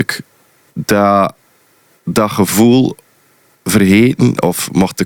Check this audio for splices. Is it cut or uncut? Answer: uncut